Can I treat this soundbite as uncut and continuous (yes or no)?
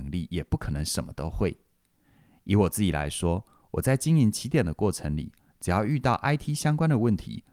yes